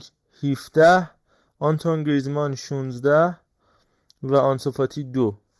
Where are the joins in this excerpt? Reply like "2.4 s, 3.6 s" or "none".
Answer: none